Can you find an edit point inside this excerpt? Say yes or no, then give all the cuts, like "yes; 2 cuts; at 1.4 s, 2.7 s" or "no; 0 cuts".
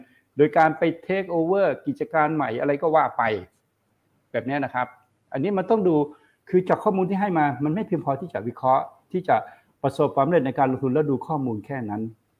no; 0 cuts